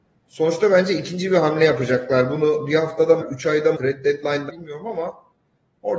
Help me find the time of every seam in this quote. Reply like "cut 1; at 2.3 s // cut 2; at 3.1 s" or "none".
cut 1; at 3.2 s // cut 2; at 3.7 s // cut 3; at 4.5 s